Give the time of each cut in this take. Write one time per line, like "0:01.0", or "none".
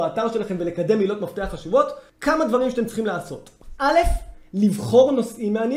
0:02.1